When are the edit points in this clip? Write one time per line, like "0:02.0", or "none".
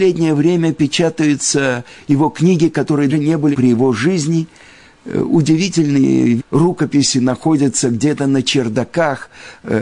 0:03.1
0:03.5
0:06.4